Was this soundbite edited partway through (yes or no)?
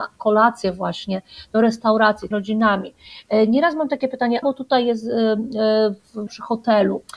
yes